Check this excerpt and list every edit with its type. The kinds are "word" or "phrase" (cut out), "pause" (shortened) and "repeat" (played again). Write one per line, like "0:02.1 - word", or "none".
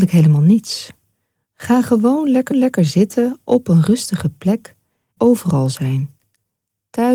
0:02.5 - repeat
0:05.2 - phrase